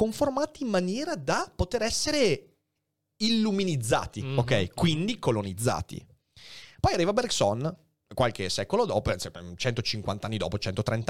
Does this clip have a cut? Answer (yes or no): no